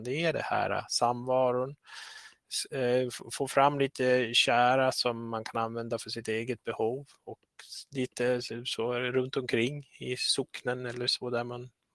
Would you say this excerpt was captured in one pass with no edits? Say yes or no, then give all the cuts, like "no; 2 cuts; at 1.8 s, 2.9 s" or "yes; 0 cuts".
yes; 0 cuts